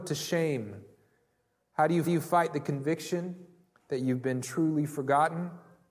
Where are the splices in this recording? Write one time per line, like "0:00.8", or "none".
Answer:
0:02.0